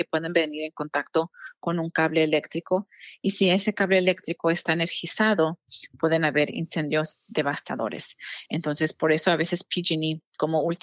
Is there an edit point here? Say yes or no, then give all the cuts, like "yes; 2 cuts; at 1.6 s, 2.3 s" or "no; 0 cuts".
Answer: no; 0 cuts